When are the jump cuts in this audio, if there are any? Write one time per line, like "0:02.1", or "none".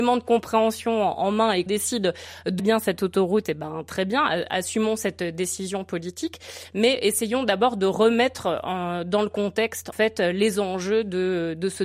0:01.7
0:02.6
0:09.9

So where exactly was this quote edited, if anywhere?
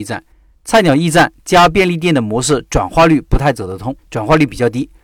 0:04.0

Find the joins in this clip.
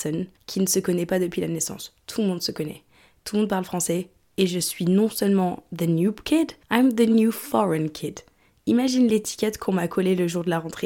none

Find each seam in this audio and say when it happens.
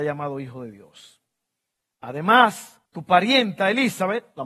0:02.9

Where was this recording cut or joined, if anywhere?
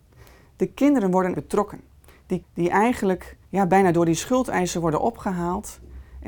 0:01.3
0:02.4
0:03.4

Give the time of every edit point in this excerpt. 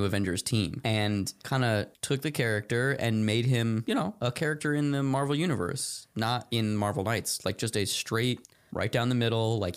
none

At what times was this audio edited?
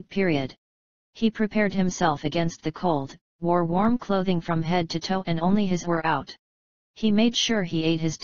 0:05.8

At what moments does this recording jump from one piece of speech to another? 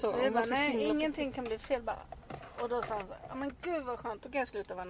none

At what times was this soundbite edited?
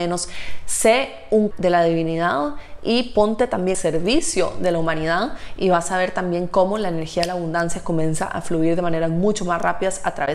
0:01.5
0:03.7

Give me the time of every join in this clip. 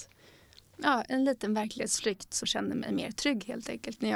0:02.4

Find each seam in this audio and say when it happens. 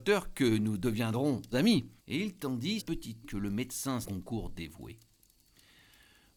0:01.5
0:02.0
0:02.8
0:03.2
0:04.0

